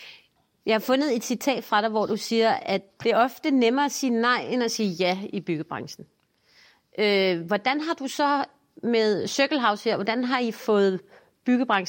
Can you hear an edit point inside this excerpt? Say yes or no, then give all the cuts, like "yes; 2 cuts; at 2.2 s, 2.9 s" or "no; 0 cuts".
no; 0 cuts